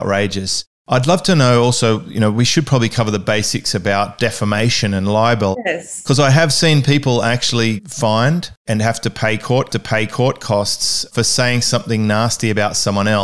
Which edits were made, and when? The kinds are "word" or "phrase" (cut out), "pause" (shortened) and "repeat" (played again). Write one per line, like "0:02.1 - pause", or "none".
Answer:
0:07.8 - word
0:08.6 - pause
0:09.7 - repeat